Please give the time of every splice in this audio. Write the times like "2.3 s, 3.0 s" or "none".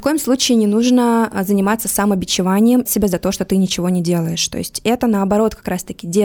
2.9 s